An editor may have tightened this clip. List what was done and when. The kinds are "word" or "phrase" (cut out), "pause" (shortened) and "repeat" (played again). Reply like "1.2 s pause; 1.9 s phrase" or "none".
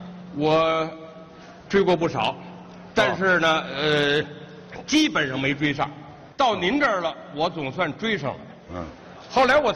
6.3 s pause